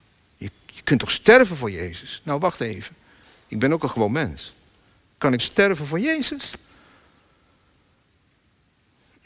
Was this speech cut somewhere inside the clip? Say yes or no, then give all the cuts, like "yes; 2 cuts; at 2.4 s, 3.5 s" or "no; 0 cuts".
yes; 1 cut; at 5.4 s